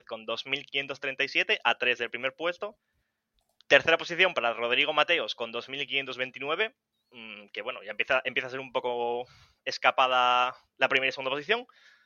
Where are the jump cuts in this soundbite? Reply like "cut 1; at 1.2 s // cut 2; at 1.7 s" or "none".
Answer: none